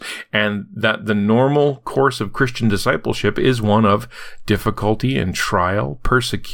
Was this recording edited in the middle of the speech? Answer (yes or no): no